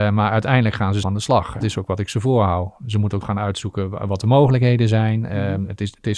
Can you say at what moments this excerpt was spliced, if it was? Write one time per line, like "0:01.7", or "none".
0:01.0
0:01.6
0:03.2